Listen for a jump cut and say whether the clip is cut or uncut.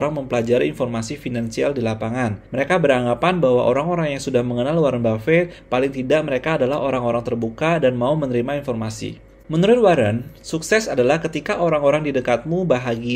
cut